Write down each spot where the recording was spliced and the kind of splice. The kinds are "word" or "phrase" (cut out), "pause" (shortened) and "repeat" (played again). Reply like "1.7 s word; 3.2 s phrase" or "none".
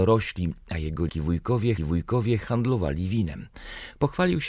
1.1 s word; 1.8 s repeat